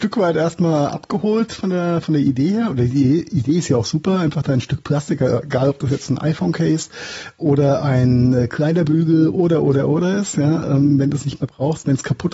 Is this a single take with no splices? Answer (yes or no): yes